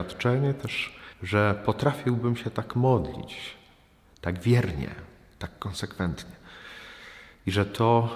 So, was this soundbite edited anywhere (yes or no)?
yes